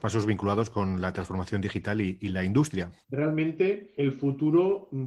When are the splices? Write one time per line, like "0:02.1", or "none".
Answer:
0:03.0

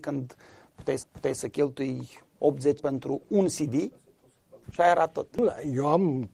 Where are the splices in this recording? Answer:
0:01.0
0:02.8
0:04.6

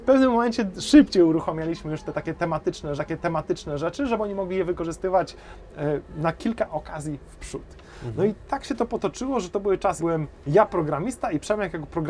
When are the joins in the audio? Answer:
0:03.0
0:10.0

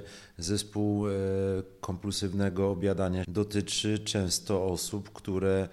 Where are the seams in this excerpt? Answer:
0:03.2

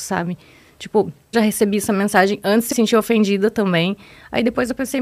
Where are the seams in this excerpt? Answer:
0:01.3
0:02.7

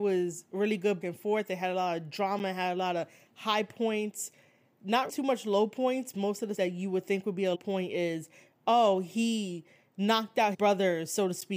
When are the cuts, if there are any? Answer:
0:01.0
0:05.1
0:06.1
0:06.6
0:07.5
0:10.5

